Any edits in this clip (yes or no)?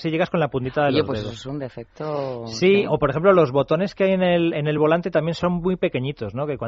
no